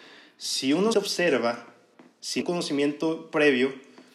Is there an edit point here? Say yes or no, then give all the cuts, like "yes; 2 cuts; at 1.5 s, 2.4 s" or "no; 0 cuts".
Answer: yes; 2 cuts; at 0.9 s, 2.4 s